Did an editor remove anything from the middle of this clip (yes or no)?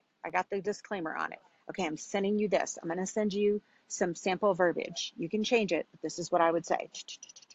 no